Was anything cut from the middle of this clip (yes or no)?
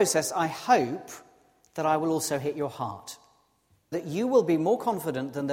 yes